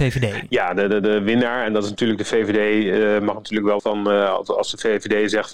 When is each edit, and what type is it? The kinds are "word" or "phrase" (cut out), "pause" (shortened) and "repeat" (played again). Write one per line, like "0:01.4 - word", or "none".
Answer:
0:03.8 - word